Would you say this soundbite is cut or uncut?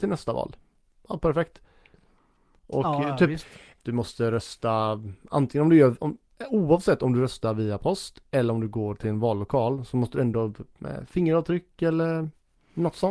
cut